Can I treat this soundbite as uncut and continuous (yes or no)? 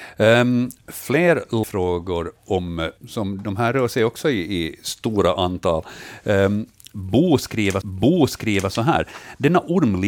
no